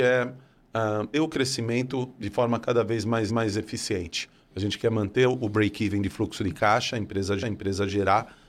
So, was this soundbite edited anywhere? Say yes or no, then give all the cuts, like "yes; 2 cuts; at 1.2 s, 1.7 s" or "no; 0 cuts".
yes; 3 cuts; at 1.1 s, 3.3 s, 7.4 s